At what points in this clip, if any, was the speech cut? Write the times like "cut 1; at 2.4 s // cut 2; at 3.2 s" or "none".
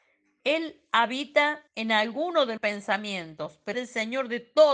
cut 1; at 1.7 s // cut 2; at 2.6 s // cut 3; at 3.7 s

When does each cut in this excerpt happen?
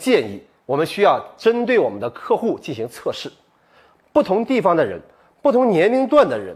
none

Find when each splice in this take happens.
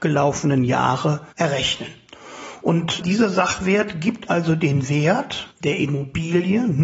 cut 1; at 1.3 s // cut 2; at 5.5 s

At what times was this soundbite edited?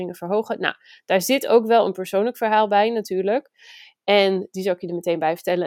none

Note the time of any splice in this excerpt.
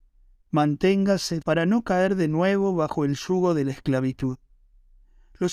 cut 1; at 1.4 s

